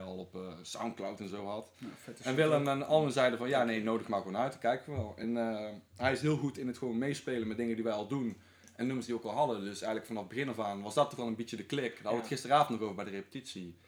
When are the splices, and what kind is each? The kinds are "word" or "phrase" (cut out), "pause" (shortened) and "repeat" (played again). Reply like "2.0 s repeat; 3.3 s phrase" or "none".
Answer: none